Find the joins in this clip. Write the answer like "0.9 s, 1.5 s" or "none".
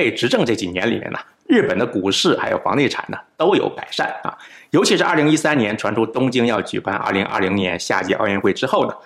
none